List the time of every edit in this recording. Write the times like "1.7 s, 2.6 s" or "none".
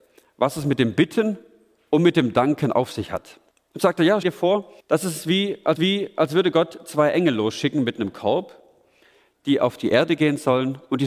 3.5 s, 4.2 s, 4.8 s, 5.8 s